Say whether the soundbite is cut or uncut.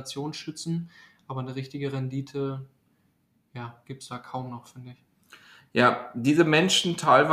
uncut